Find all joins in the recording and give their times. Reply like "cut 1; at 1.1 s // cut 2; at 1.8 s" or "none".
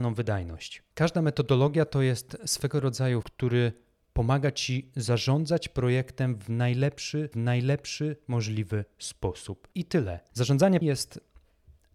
cut 1; at 3.2 s // cut 2; at 7.3 s // cut 3; at 9.7 s // cut 4; at 10.8 s